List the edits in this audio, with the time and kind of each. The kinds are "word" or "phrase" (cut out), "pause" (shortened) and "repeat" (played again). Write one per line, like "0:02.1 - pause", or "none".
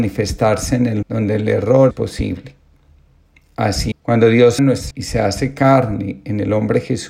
0:01.0 - word
0:01.9 - word
0:03.9 - word
0:04.6 - word
0:04.9 - word